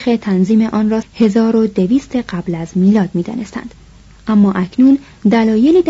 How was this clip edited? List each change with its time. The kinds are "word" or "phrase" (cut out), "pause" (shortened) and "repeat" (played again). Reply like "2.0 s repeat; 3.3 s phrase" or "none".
1.0 s word